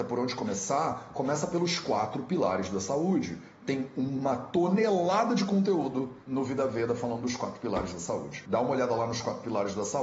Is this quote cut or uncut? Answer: cut